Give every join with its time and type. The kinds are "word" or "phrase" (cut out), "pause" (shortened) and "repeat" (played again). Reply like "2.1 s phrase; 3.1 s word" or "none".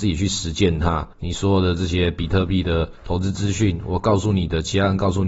1.1 s pause; 3.0 s pause